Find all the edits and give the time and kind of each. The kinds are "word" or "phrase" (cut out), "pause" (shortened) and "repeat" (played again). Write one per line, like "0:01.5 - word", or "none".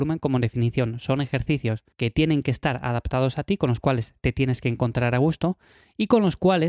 0:01.9 - pause